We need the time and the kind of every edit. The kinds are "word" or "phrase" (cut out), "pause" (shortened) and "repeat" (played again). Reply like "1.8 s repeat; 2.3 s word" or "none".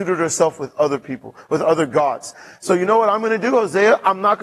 none